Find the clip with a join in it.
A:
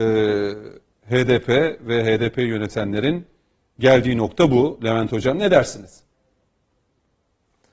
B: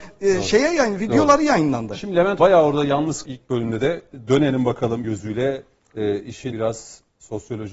B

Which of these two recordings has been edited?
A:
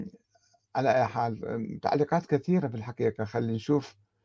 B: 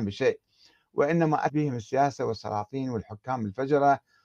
B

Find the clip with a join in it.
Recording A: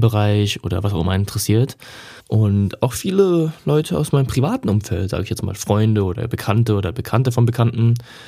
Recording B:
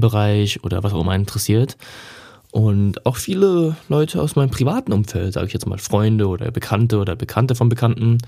A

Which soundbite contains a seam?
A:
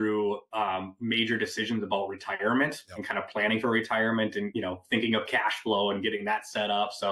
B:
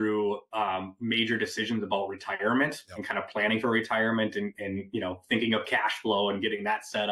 A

